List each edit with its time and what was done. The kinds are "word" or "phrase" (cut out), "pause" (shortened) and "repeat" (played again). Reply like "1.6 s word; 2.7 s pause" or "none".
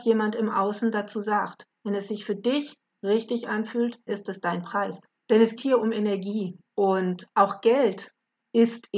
4.1 s word; 5.2 s pause; 5.6 s word; 6.7 s pause